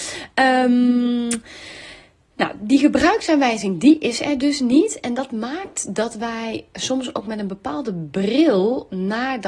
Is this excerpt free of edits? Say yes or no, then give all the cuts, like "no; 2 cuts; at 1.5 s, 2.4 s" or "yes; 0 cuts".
yes; 0 cuts